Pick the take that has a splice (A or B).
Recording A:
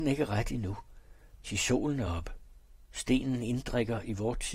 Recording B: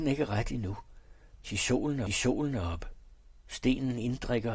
B